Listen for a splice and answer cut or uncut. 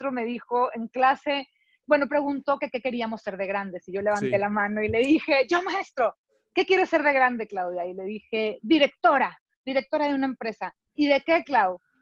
uncut